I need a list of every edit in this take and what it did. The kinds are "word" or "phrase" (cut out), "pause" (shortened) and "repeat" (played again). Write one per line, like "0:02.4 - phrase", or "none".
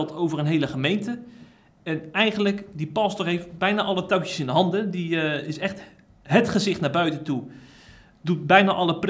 none

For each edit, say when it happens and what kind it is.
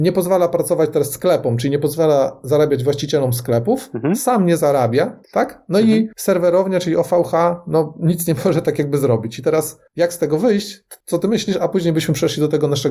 0:05.2 - pause
0:06.1 - pause
0:09.9 - pause
0:11.0 - pause

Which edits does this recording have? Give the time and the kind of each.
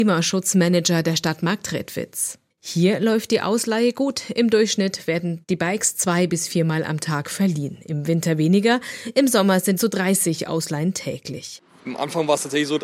0:09.8 - phrase

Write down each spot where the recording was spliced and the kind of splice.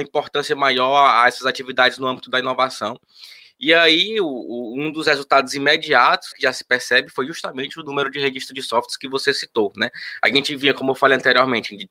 0:06.3 - word

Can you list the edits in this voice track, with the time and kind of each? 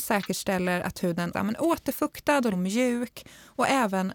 0:01.3 - word
0:02.5 - word

